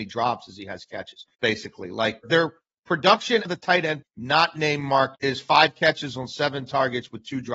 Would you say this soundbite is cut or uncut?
cut